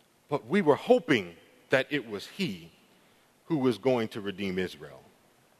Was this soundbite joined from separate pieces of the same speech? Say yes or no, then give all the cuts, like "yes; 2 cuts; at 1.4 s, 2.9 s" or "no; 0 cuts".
no; 0 cuts